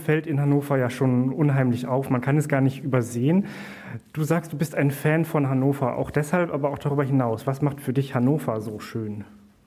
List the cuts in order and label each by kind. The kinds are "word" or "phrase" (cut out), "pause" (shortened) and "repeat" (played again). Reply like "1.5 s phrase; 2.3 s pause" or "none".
none